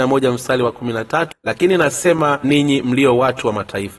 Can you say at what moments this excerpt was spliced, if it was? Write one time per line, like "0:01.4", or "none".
0:01.3
0:02.4